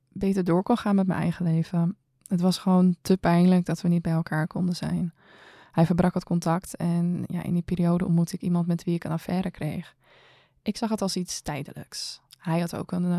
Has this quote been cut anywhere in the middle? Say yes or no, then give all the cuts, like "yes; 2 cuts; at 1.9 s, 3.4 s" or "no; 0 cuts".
no; 0 cuts